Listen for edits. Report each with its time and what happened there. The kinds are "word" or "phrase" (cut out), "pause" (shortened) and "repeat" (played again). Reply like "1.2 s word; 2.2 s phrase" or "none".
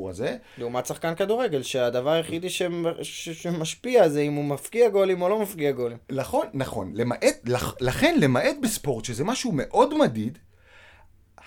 none